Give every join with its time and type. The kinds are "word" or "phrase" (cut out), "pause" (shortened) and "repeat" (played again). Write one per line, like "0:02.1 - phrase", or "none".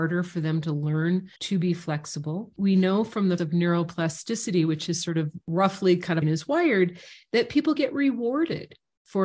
0:01.4 - pause
0:03.4 - word
0:06.2 - phrase
0:07.8 - word